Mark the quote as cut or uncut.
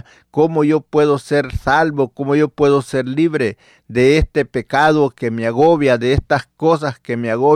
uncut